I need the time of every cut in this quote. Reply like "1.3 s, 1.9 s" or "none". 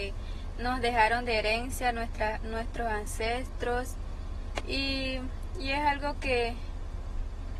none

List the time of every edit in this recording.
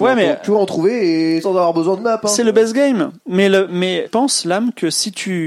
1.4 s, 2.0 s, 3.7 s, 4.1 s

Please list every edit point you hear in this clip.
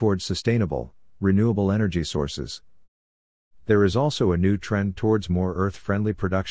none

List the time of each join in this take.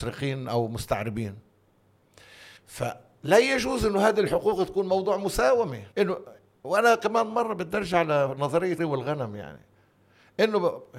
2.6 s, 5.9 s, 8.8 s

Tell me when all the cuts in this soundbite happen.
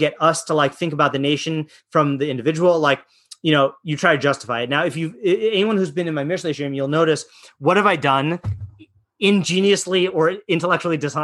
none

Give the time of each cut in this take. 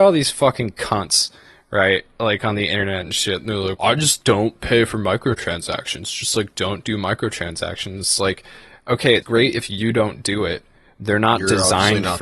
3.8 s, 4.2 s, 9.2 s

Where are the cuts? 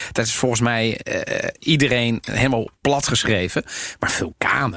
2.8 s

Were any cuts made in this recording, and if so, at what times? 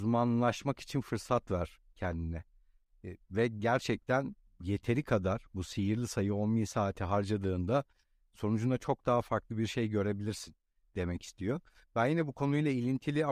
none

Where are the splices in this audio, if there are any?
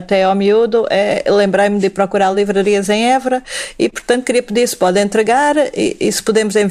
none

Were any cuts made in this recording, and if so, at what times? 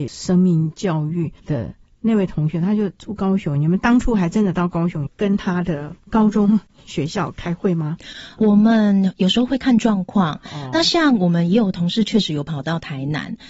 none

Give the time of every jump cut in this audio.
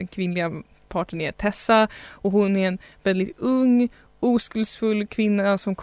none

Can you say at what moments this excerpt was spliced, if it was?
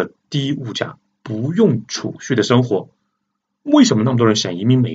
none

